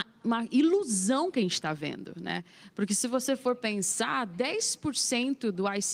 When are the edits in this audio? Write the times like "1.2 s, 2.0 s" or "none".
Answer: none